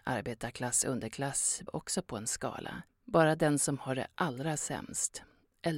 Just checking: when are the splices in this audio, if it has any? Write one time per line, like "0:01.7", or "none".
0:01.7
0:02.9